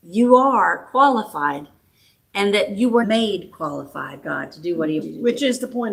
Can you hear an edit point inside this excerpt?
yes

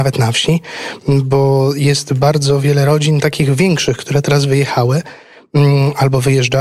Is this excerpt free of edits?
yes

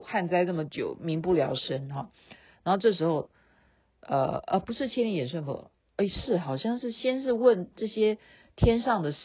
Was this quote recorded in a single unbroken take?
yes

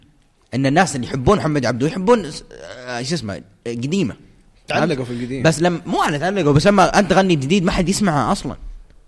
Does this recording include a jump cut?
no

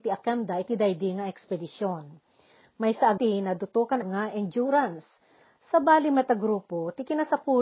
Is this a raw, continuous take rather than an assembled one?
no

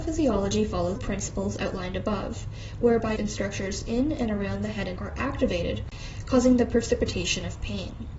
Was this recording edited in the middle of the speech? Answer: yes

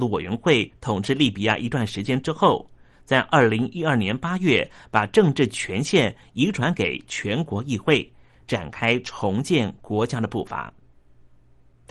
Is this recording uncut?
yes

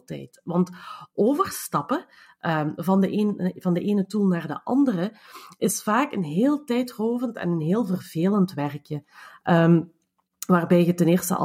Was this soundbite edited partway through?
no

